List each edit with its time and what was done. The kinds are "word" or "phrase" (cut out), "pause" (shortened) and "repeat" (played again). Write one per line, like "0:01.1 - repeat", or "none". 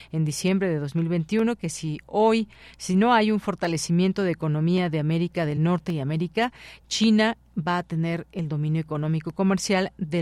none